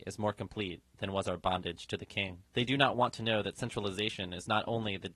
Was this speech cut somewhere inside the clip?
yes; 1 cut; at 2.5 s

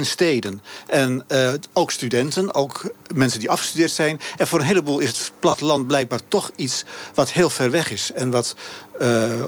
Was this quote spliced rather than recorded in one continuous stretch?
no; 0 cuts

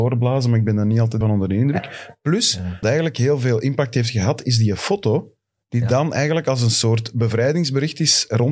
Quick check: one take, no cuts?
no; 2 cuts; at 1.2 s, 2.8 s

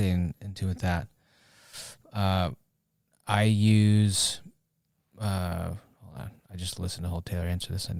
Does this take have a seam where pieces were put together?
no; 0 cuts

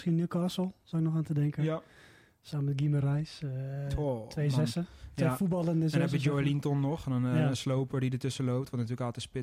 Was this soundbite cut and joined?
no; 0 cuts

